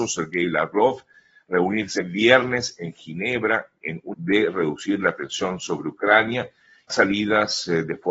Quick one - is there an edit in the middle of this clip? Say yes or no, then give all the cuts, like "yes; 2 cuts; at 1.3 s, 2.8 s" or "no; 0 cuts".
yes; 3 cuts; at 2.0 s, 4.1 s, 6.9 s